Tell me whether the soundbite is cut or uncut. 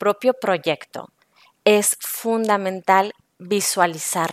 uncut